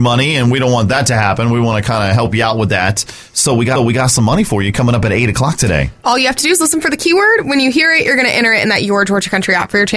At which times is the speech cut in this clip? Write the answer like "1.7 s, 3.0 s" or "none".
3.7 s

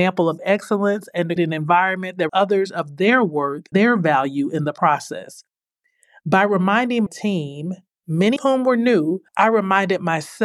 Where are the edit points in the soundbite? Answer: 1.4 s, 2.3 s, 3.7 s, 7.1 s, 8.4 s, 9.3 s

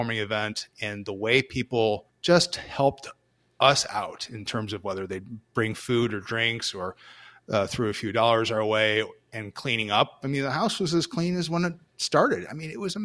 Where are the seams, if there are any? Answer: 2.1 s

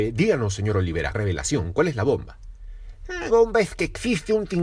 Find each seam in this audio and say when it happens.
1.1 s, 3.3 s

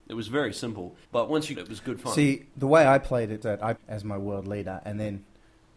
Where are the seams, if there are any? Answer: 1.0 s, 1.5 s, 2.5 s, 3.4 s, 3.8 s

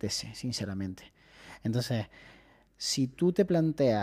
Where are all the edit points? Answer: none

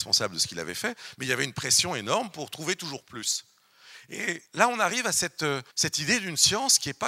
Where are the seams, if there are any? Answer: 4.5 s, 5.7 s

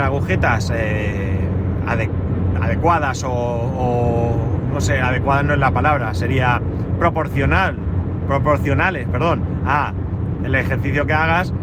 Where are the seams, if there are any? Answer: none

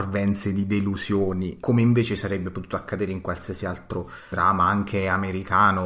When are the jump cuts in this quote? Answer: 4.3 s

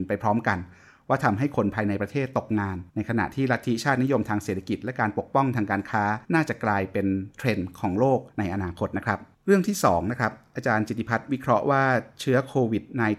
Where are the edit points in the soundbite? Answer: 2.9 s, 6.2 s, 8.3 s, 9.3 s

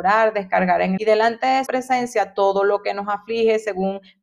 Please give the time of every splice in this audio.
1.0 s, 1.7 s

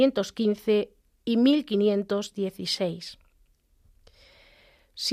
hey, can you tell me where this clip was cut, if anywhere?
none

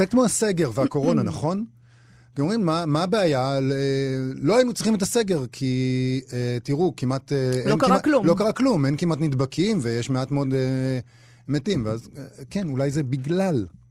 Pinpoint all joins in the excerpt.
none

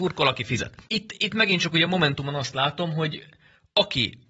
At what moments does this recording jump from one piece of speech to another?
none

